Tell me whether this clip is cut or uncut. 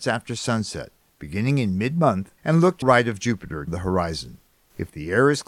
cut